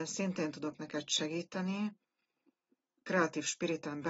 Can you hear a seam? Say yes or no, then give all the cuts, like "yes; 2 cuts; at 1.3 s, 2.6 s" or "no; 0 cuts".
no; 0 cuts